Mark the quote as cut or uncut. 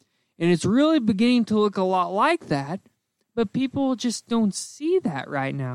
uncut